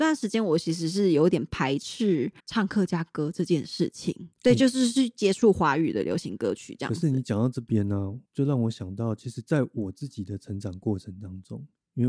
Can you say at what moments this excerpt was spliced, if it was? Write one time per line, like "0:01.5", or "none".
0:02.4
0:04.3
0:08.3